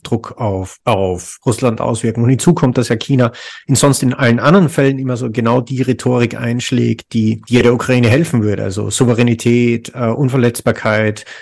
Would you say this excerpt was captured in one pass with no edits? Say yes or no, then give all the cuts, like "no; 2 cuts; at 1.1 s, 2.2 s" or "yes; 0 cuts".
yes; 0 cuts